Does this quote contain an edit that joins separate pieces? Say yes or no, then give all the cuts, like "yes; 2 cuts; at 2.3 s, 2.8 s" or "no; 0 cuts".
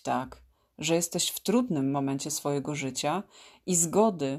no; 0 cuts